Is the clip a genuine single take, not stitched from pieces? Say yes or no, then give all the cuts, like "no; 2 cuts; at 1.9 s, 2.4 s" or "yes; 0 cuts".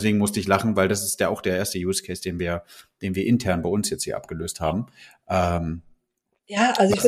yes; 0 cuts